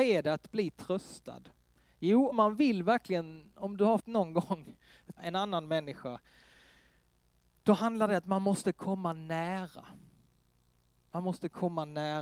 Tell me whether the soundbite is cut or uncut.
cut